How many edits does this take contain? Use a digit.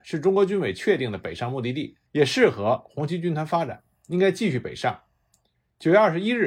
1